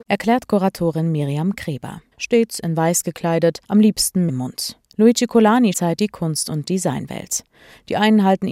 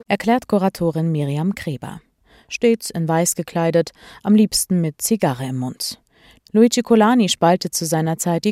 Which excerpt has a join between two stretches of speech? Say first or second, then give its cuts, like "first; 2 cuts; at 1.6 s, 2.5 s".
first; 5 cuts; at 2.1 s, 3.6 s, 4.3 s, 4.9 s, 5.7 s